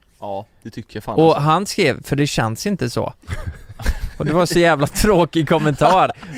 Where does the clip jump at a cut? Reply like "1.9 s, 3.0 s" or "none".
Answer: none